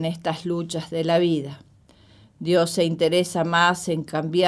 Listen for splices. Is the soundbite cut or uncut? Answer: uncut